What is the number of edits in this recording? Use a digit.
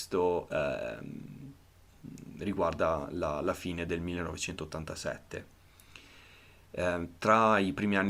0